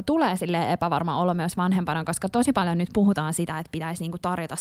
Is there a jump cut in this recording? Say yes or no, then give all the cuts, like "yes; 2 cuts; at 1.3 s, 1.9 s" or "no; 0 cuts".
no; 0 cuts